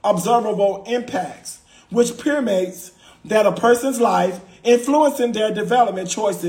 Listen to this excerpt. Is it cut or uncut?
uncut